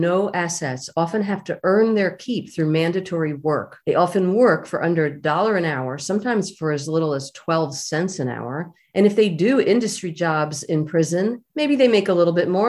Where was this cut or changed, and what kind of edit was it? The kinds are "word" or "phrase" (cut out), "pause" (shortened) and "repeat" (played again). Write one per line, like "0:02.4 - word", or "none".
0:03.8 - pause
0:08.8 - pause
0:11.5 - pause